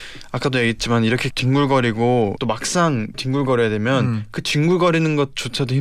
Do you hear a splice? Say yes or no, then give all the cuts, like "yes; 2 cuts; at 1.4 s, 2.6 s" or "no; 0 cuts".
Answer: yes; 3 cuts; at 1.3 s, 2.4 s, 3.1 s